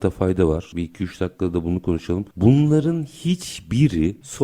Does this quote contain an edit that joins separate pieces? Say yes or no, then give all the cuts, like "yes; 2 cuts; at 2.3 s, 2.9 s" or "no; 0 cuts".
no; 0 cuts